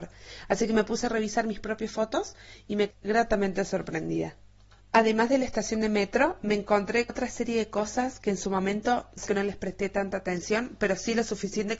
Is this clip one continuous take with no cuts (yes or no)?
no